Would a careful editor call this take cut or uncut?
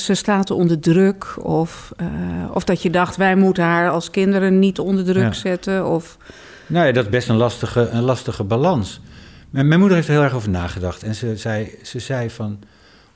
uncut